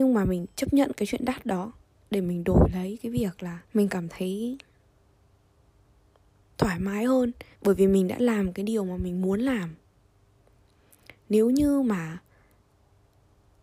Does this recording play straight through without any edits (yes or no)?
no